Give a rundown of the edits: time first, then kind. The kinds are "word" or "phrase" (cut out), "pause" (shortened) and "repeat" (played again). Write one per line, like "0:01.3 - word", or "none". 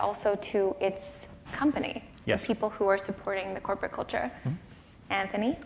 none